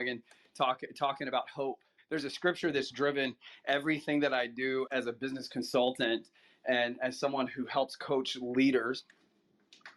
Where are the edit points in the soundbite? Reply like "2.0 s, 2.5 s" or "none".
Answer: 2.0 s, 4.9 s